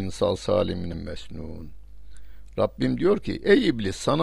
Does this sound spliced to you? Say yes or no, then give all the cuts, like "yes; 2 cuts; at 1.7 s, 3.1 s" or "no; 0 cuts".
yes; 1 cut; at 0.9 s